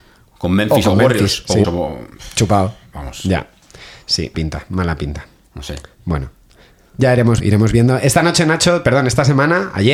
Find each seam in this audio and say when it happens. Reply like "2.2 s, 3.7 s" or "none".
1.6 s, 4.3 s, 7.4 s